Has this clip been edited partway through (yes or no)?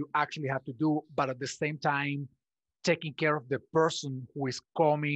no